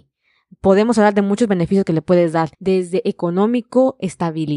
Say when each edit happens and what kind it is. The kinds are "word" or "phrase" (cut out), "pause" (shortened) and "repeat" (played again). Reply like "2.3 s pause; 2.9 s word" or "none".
2.5 s pause